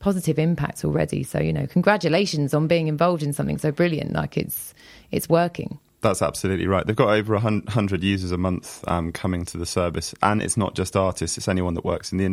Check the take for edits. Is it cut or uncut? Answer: uncut